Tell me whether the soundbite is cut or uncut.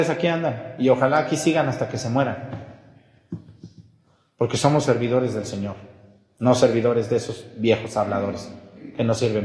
uncut